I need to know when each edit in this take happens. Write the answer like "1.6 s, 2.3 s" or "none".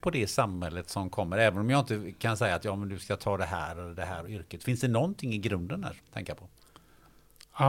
6.0 s